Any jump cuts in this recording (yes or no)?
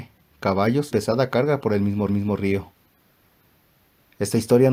yes